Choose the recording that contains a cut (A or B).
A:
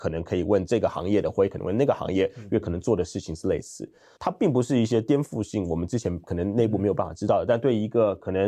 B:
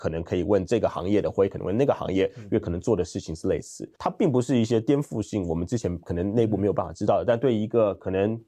B